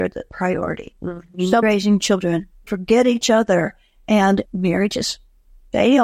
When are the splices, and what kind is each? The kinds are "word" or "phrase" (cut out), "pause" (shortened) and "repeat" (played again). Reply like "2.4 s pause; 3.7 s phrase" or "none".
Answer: 1.6 s word; 2.7 s word; 4.5 s word